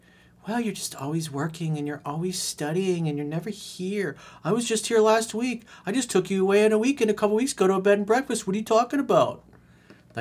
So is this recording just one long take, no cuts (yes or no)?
yes